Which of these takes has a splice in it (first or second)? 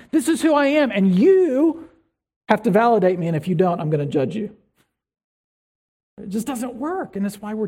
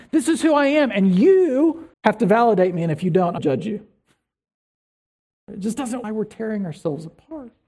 second